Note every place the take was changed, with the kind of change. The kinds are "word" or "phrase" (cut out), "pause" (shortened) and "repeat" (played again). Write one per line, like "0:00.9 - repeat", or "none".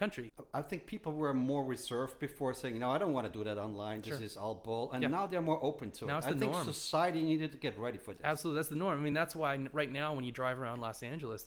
none